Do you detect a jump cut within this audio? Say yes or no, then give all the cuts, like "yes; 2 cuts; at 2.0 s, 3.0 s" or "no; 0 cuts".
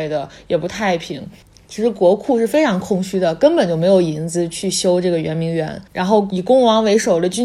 yes; 1 cut; at 5.9 s